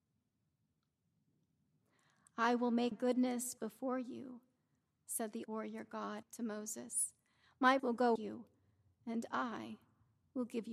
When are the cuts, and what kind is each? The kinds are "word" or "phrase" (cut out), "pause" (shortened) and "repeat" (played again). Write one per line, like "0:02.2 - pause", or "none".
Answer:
0:02.9 - word
0:03.6 - word
0:05.4 - word
0:06.2 - word
0:07.8 - word
0:08.2 - word

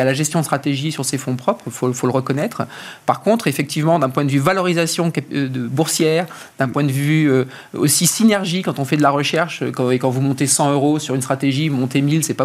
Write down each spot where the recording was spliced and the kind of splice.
none

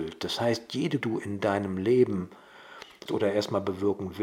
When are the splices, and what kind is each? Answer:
0:01.0 - phrase
0:03.1 - word

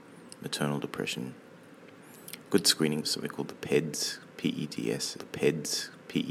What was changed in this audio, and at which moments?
0:03.0 - word
0:05.2 - repeat

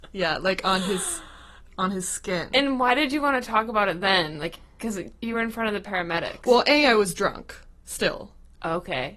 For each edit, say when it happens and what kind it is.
none

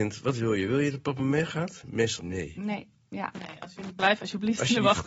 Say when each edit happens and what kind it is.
0:01.2 - word
0:02.2 - word

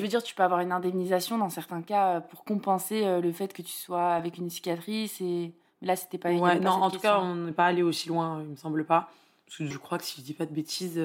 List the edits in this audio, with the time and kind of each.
0:09.7 - phrase

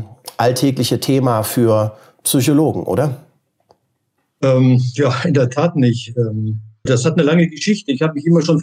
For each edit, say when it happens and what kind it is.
0:06.9 - word

